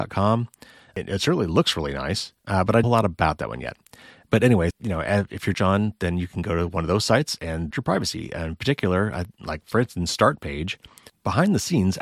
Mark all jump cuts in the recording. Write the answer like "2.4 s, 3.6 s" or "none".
2.4 s, 2.8 s, 4.7 s, 5.5 s, 7.7 s